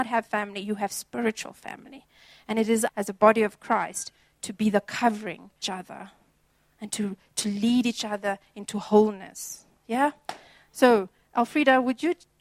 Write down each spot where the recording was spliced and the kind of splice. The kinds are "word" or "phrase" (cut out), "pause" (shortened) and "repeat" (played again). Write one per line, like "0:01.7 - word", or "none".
0:02.9 - phrase
0:05.6 - phrase

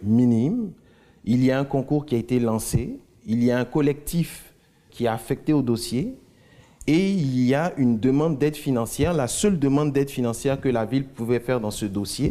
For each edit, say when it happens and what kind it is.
0:04.9 - word

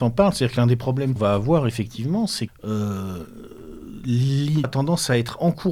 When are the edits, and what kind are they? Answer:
0:01.2 - word
0:02.5 - word
0:04.6 - word

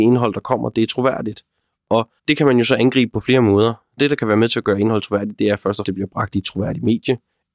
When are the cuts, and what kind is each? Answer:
0:02.2 - pause
0:04.0 - word
0:05.8 - word

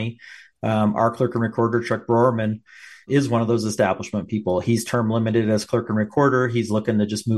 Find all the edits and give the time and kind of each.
0:03.1 - word

